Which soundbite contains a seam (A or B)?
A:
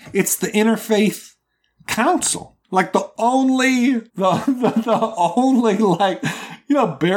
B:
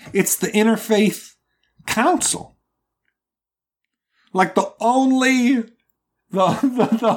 A